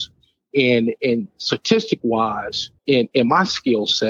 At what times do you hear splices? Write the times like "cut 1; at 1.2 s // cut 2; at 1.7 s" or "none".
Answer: cut 1; at 2.8 s